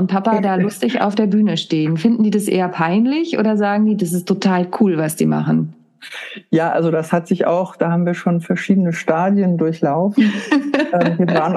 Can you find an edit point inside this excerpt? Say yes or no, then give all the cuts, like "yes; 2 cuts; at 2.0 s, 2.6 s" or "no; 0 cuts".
no; 0 cuts